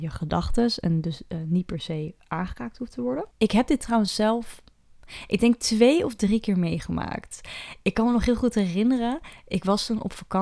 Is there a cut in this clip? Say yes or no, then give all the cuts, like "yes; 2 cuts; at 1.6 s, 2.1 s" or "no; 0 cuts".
no; 0 cuts